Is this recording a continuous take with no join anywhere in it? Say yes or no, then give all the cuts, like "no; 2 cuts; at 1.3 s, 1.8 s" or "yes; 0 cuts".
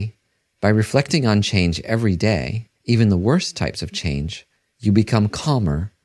no; 2 cuts; at 2.7 s, 4.5 s